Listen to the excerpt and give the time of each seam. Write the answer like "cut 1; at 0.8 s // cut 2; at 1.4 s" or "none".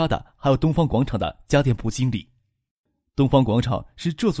none